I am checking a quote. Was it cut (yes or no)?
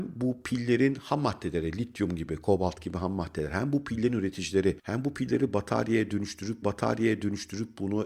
yes